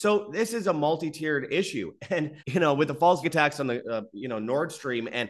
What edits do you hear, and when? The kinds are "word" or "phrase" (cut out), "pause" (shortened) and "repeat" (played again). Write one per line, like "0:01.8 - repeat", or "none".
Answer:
0:02.4 - pause
0:03.2 - word